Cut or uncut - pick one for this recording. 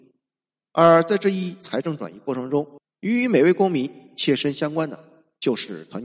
cut